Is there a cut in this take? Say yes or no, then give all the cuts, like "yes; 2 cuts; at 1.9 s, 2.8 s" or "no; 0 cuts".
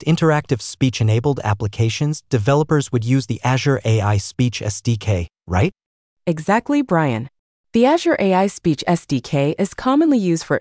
no; 0 cuts